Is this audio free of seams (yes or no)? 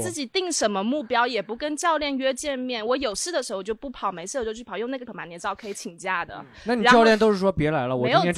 no